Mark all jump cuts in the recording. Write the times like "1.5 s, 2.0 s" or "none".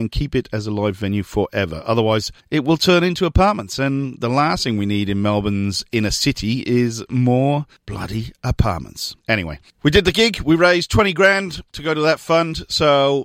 9.2 s